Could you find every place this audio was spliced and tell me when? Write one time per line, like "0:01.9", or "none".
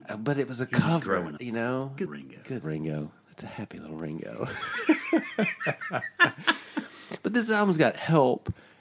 0:01.4
0:02.1
0:02.6